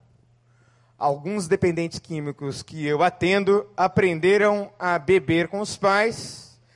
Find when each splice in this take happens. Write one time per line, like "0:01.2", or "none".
none